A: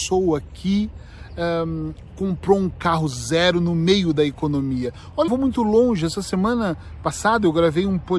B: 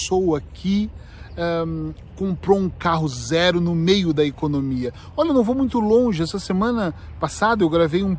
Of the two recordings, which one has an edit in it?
A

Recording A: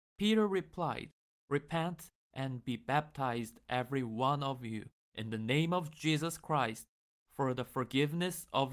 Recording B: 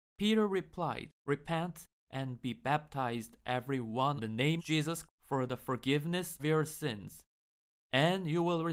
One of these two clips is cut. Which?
B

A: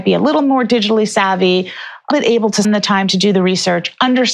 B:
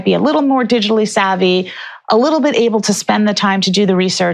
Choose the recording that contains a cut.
A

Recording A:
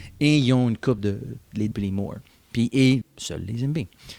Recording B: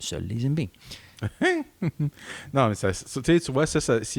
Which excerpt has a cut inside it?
A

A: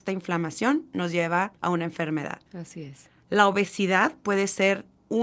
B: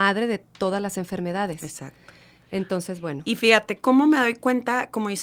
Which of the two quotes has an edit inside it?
A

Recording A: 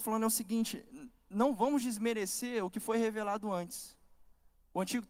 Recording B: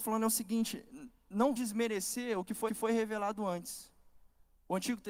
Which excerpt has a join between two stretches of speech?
B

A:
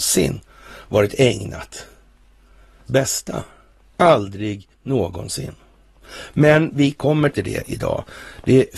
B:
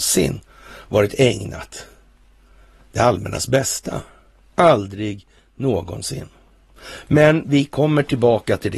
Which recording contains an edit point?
A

